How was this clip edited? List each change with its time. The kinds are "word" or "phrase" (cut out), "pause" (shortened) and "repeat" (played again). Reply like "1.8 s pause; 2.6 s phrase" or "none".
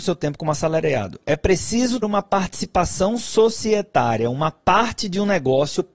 2.0 s word